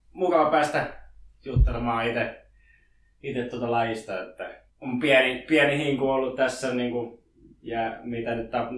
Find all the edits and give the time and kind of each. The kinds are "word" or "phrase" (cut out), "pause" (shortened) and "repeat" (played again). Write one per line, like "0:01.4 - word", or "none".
0:04.7 - pause